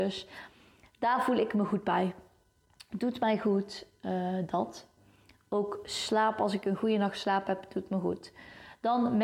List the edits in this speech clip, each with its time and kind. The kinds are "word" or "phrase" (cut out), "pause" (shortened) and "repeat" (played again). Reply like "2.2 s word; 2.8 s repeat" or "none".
none